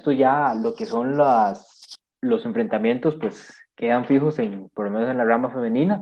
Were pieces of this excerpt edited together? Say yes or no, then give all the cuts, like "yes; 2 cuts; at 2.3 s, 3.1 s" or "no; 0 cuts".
no; 0 cuts